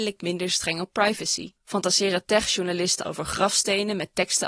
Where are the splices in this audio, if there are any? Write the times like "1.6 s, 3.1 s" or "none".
1.6 s, 3.0 s